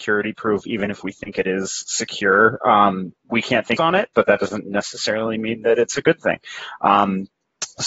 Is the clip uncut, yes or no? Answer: no